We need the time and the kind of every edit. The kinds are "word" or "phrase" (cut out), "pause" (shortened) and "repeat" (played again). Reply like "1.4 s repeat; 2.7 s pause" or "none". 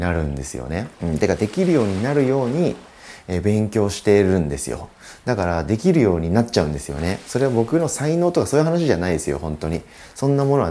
0.9 s pause